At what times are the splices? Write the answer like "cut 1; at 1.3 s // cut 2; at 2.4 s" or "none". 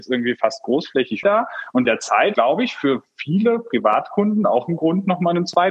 cut 1; at 1.2 s // cut 2; at 1.9 s // cut 3; at 2.3 s